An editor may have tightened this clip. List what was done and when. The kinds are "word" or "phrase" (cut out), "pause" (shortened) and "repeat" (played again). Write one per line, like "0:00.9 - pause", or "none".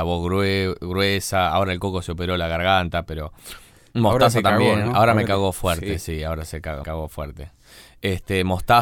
0:06.8 - word